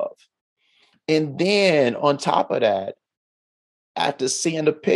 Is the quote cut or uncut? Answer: uncut